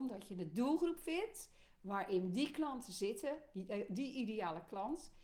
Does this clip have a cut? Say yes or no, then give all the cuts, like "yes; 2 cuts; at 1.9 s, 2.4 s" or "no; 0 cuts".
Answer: no; 0 cuts